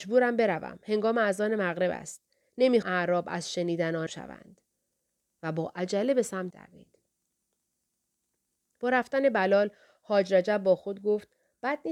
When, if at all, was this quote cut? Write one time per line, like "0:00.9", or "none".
0:02.8
0:04.1
0:06.5